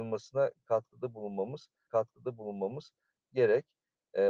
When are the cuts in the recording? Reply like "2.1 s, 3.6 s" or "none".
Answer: 1.9 s

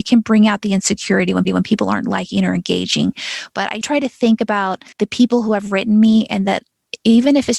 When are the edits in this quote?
1.5 s, 3.8 s, 4.9 s

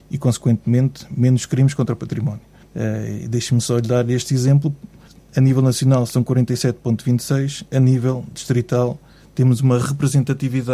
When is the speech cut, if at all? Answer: 2.6 s, 5.1 s

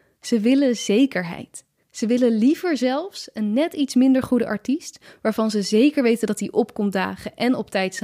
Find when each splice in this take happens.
1.8 s

